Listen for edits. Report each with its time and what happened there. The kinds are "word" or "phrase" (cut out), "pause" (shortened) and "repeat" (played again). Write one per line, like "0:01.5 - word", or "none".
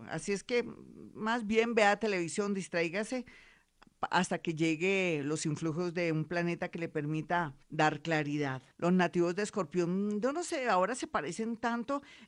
0:07.6 - pause
0:08.7 - pause